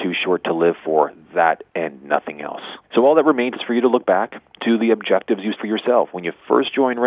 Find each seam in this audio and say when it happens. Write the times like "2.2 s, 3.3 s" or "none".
1.7 s, 2.8 s, 3.6 s, 5.6 s